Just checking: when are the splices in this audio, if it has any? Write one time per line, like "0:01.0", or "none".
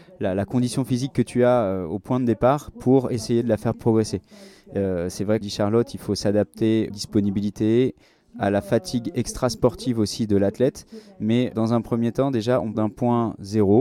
0:05.4
0:06.9
0:11.5
0:12.7